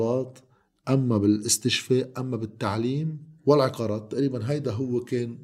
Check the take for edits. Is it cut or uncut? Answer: cut